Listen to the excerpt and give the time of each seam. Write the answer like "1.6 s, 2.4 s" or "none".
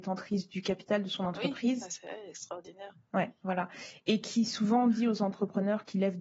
none